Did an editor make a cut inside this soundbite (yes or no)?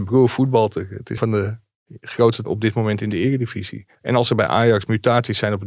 yes